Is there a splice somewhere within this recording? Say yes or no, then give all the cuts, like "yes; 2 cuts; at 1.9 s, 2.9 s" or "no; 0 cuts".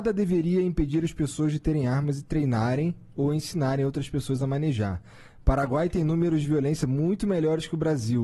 no; 0 cuts